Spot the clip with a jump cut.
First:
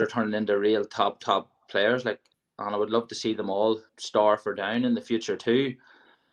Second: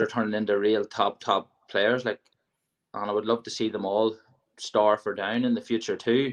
first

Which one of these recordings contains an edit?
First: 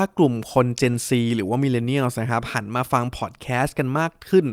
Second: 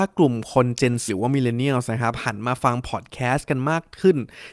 second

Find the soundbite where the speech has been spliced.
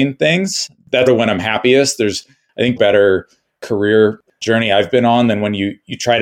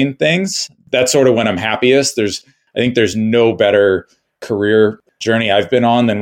first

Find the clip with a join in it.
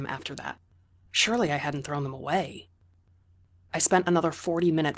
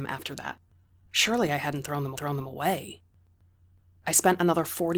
second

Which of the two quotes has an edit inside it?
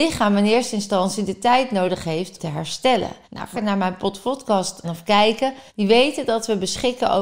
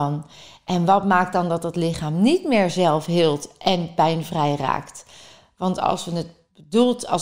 first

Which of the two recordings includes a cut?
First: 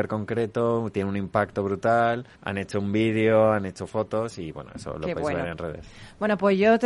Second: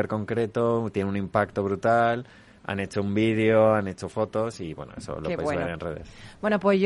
first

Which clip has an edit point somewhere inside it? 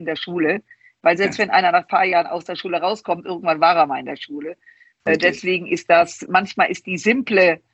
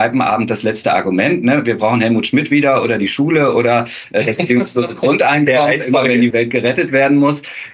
second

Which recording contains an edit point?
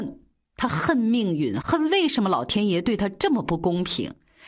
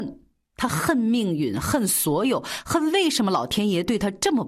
first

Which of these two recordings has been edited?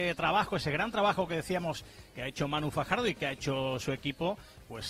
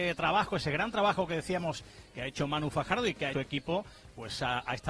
second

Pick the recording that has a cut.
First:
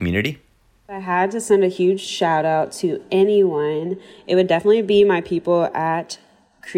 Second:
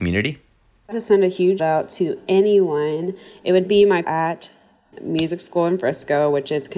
second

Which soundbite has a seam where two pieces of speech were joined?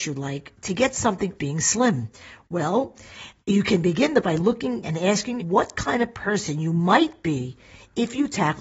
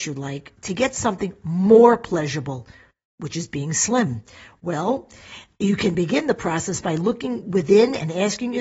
first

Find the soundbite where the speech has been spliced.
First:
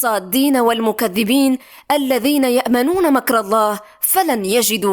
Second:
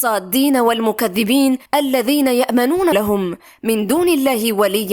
second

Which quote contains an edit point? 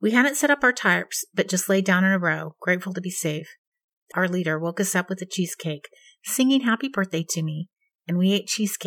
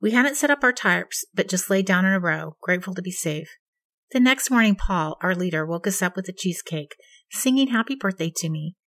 first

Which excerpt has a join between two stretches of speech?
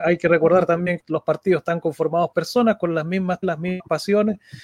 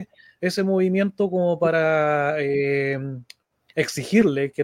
first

